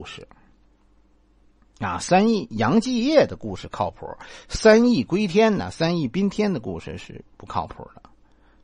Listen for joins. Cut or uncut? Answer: uncut